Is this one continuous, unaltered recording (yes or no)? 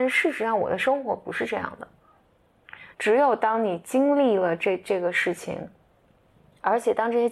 yes